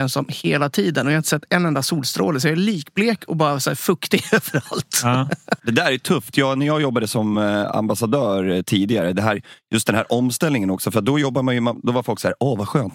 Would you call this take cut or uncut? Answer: uncut